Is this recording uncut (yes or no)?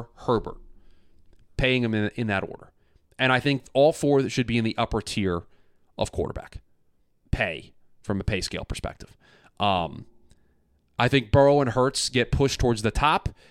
yes